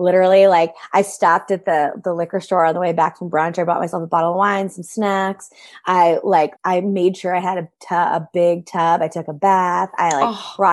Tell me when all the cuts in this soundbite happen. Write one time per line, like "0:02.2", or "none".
0:06.6

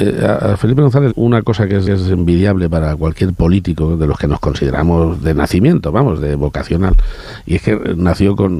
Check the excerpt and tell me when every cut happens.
0:01.1
0:01.9

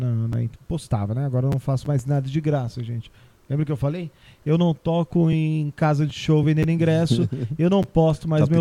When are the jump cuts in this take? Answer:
none

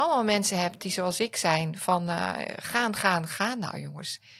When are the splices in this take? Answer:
none

